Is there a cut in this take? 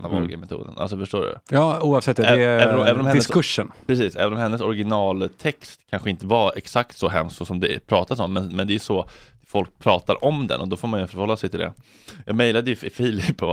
no; 0 cuts

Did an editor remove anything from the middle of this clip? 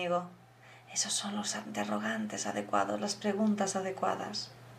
no; 0 cuts

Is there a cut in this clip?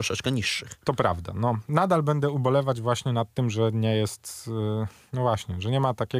no; 0 cuts

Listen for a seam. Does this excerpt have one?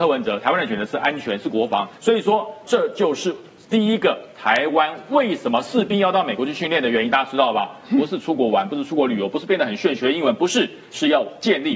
yes; 2 cuts; at 2.0 s, 2.7 s

